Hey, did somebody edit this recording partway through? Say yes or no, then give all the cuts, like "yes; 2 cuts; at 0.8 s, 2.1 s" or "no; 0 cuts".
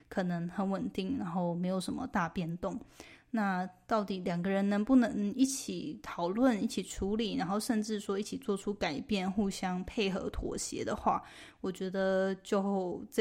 no; 0 cuts